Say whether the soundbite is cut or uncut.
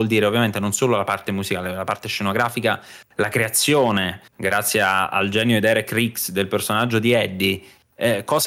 cut